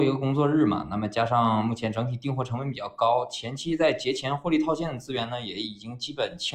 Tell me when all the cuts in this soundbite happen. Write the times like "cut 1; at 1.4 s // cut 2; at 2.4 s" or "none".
none